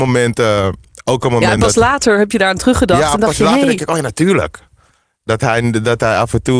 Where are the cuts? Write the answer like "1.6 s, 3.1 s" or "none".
none